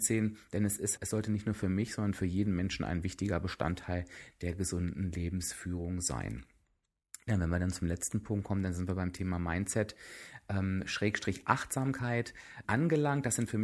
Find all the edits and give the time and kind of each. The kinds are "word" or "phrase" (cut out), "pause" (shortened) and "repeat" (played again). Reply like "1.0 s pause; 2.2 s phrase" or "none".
1.0 s word; 12.6 s word

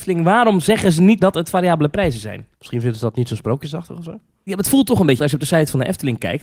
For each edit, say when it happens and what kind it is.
1.2 s word; 2.5 s pause; 5.2 s word

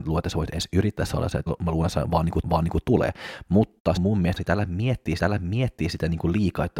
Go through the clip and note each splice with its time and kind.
1.5 s word; 2.4 s repeat; 4.0 s phrase; 4.4 s phrase; 5.2 s repeat

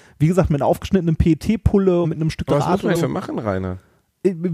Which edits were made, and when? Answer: 2.0 s word; 2.5 s word; 2.9 s word

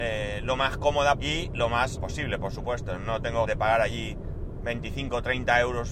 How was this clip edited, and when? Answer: 1.2 s word; 2.0 s word; 3.5 s word

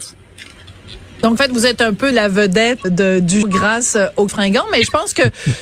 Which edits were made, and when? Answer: 1.4 s word; 2.1 s word; 2.8 s word; 3.4 s word; 4.3 s word

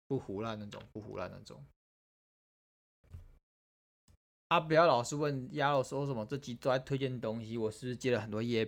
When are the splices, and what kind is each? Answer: none

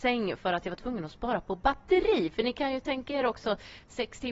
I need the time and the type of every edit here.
none

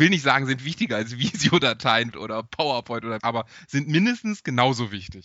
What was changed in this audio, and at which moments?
2.1 s word; 3.2 s word

